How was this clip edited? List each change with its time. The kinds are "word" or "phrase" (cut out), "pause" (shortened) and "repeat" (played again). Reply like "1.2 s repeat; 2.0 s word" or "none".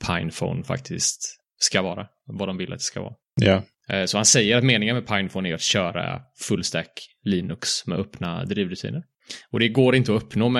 none

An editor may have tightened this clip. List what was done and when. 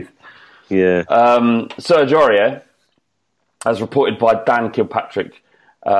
none

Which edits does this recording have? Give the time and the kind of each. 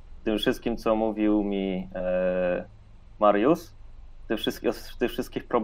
none

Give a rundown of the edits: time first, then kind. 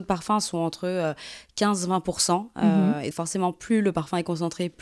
3.1 s word

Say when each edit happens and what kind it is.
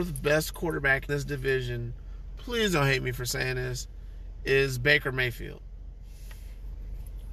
1.1 s word

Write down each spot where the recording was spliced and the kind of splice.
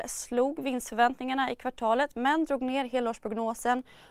none

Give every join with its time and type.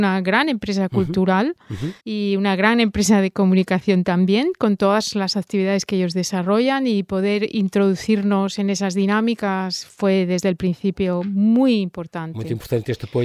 2.0 s pause

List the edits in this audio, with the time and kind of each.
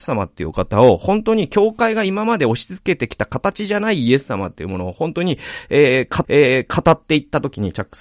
6.2 s repeat

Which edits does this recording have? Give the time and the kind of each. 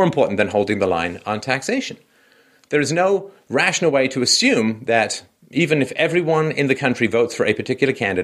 none

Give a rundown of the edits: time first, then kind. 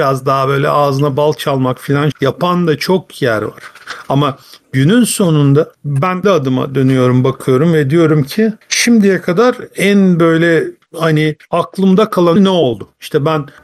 2.1 s word; 6.2 s word; 12.4 s word

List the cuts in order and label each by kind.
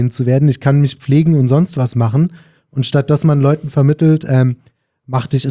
none

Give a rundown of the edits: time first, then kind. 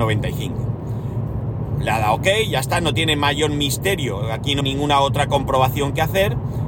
4.6 s word

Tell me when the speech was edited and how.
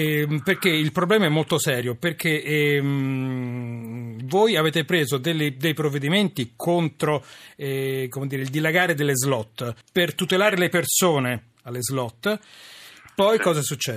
9.8 s pause

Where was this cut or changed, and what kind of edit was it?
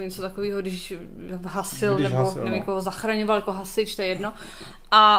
none

